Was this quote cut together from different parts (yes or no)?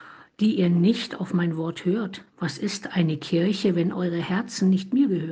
yes